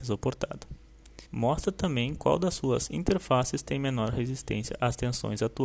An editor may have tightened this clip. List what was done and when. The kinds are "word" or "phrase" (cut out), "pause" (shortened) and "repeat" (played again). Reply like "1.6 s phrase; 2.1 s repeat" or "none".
1.3 s pause